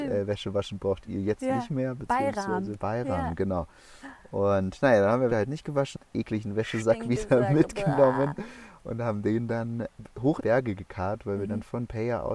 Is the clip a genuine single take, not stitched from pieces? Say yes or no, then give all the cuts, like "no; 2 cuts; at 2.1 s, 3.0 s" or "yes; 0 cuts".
no; 3 cuts; at 2.8 s, 5.3 s, 10.4 s